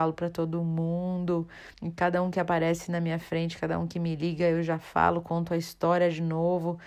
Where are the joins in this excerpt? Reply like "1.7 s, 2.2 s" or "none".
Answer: 1.7 s